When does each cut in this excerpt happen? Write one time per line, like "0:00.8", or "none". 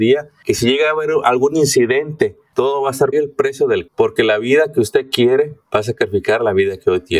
0:03.1
0:03.9